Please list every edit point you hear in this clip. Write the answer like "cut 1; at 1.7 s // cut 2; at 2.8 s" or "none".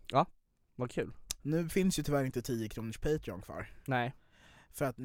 cut 1; at 1.4 s